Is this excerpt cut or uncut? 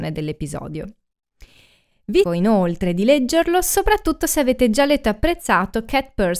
cut